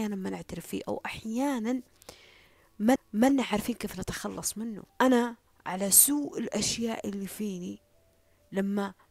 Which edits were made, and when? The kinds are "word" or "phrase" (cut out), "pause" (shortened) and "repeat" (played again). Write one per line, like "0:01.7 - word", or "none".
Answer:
0:03.0 - repeat
0:04.9 - pause